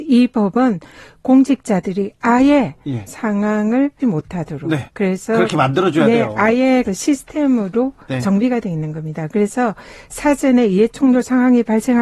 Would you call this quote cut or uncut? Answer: cut